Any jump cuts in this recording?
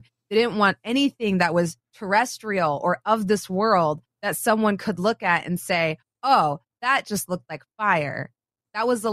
yes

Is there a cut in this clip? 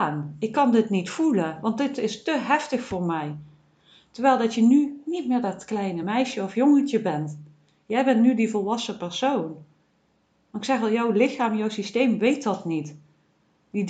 no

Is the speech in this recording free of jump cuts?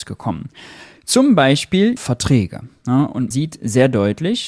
no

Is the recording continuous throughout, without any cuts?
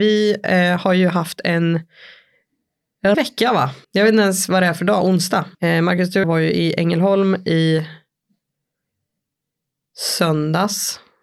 no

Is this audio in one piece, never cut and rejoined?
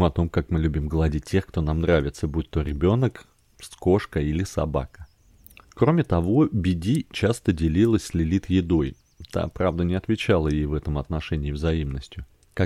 yes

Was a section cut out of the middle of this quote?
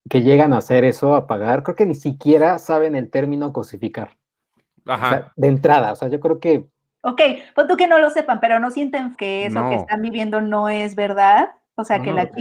yes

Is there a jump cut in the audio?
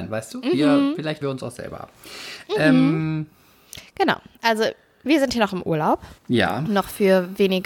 yes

